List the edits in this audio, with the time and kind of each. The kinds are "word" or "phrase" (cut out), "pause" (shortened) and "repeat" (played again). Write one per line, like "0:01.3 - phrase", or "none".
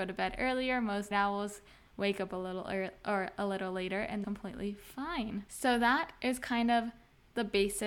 0:01.1 - word
0:04.2 - word